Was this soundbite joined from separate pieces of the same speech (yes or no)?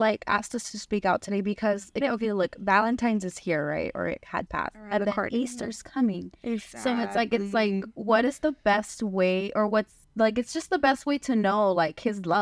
yes